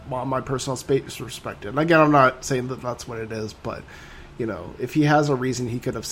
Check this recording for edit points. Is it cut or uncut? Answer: uncut